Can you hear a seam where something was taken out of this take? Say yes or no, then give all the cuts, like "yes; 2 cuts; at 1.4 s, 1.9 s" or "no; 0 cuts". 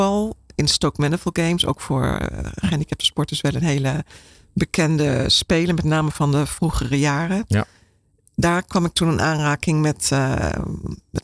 no; 0 cuts